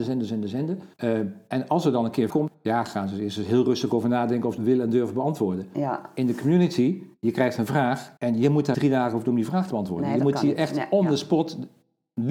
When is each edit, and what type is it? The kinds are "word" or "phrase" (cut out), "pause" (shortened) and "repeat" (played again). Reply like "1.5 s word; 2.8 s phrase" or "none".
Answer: 0.9 s pause; 2.3 s word; 4.6 s phrase; 7.2 s pause; 8.2 s pause; 8.7 s word